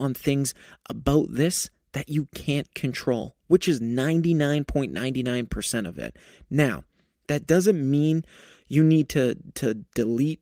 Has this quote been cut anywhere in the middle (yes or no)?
no